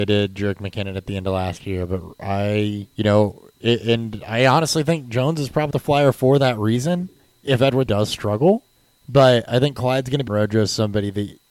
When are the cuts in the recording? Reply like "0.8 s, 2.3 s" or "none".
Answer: 2.9 s, 5.7 s, 7.2 s, 7.9 s, 8.8 s, 10.3 s